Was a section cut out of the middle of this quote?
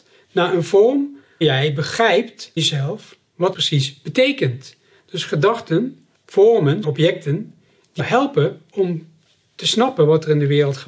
yes; 6 cuts; at 1.4 s, 2.6 s, 3.5 s, 6.1 s, 6.8 s, 8.0 s

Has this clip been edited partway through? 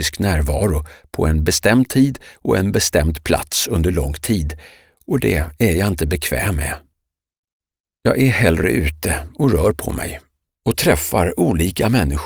no; 0 cuts

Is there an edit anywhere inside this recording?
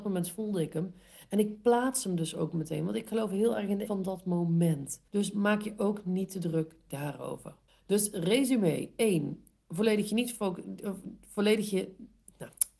yes; 3 cuts; at 3.9 s, 5.1 s, 7.7 s

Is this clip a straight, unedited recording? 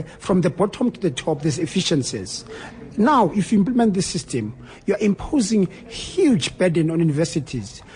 yes; 0 cuts

